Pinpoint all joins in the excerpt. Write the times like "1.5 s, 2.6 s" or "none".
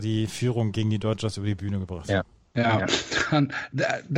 none

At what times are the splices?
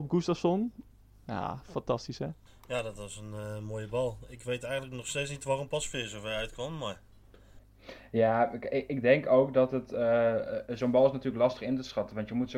none

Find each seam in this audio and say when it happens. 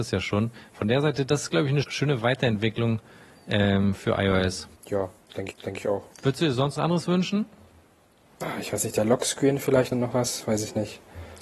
1.8 s, 4.8 s, 5.5 s, 6.1 s, 6.8 s, 9.9 s

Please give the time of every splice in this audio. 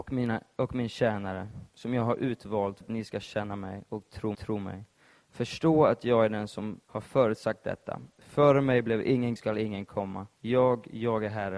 2.8 s, 4.3 s, 6.8 s, 9.4 s, 10.3 s

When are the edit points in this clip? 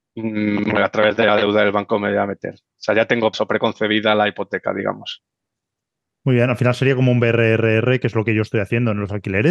3.3 s

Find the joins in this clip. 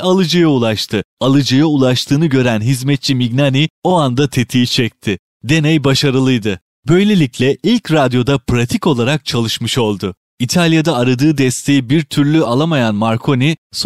none

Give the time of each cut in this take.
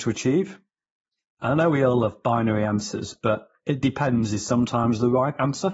none

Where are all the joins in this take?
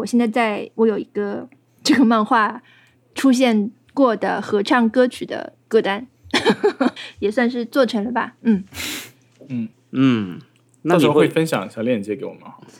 7.0 s, 9.7 s

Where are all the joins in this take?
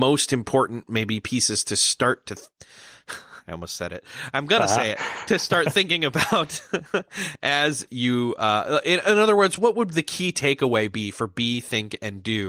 none

